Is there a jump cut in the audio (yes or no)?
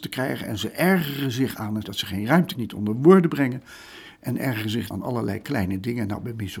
yes